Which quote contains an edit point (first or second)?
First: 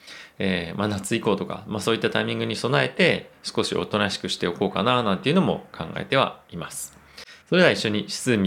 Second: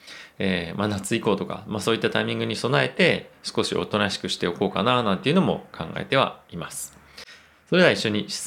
first